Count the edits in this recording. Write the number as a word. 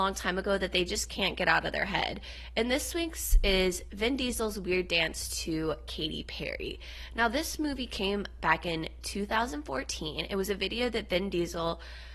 zero